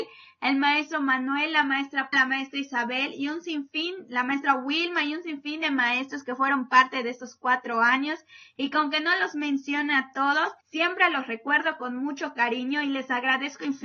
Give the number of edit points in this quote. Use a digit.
2